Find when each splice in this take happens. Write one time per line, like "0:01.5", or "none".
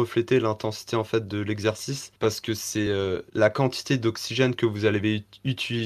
none